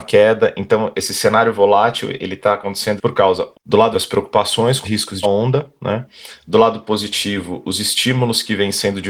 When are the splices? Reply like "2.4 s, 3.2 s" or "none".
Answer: 2.2 s, 3.0 s, 3.5 s, 3.9 s, 4.8 s, 5.2 s